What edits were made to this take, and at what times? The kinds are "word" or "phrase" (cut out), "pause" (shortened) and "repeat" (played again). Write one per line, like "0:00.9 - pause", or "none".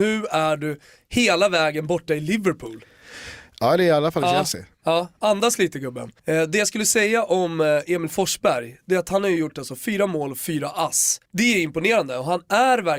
0:06.2 - pause
0:11.2 - pause